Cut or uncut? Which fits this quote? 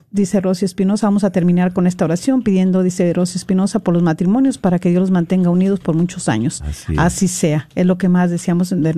uncut